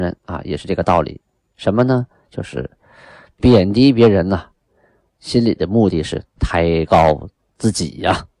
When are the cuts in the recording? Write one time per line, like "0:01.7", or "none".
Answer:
none